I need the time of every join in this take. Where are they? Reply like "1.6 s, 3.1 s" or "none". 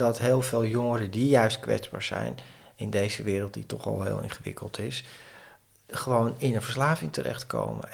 none

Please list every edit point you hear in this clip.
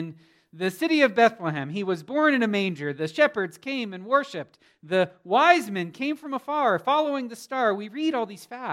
none

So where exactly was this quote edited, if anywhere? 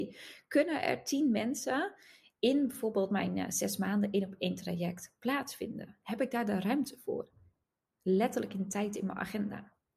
none

